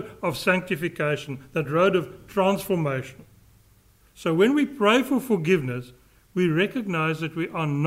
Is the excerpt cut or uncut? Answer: uncut